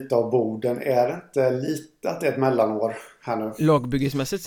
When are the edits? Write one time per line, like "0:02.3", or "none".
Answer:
none